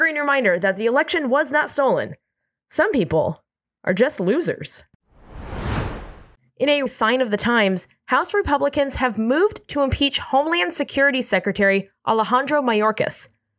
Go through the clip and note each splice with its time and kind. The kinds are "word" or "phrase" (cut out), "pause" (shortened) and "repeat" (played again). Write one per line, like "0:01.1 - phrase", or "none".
0:06.9 - phrase